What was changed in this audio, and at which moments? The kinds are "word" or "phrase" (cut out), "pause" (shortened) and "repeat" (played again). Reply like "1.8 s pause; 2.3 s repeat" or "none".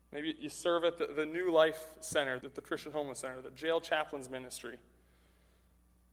2.4 s word